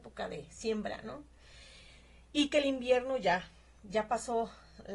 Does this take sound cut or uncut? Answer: uncut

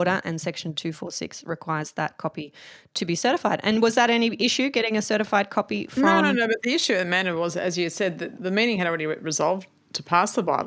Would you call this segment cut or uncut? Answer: uncut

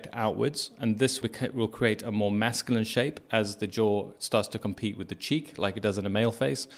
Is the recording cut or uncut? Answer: cut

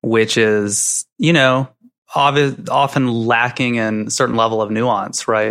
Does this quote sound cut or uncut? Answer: uncut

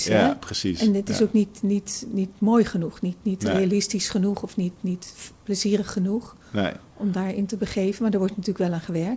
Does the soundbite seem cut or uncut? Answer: uncut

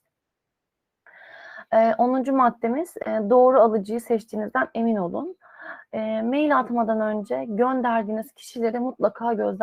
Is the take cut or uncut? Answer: uncut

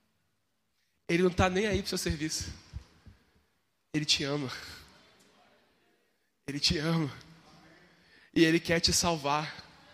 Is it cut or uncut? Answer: uncut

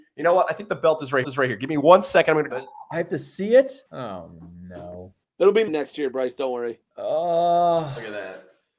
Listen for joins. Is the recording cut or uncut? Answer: cut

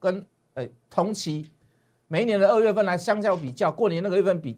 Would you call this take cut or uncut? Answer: uncut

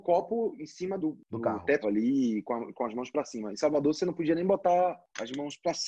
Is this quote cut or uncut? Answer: cut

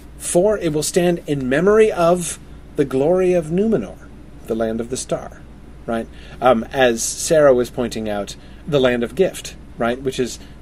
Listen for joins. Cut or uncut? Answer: cut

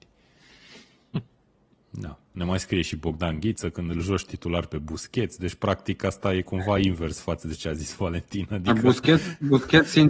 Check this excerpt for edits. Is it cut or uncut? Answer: uncut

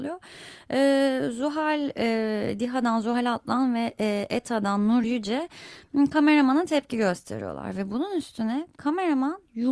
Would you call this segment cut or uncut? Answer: uncut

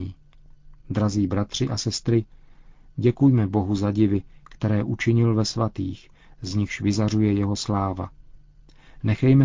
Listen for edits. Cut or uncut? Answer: uncut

